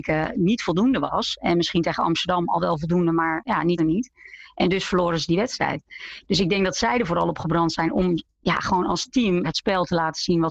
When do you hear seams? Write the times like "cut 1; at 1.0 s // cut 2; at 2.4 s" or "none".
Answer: cut 1; at 3.8 s // cut 2; at 9.4 s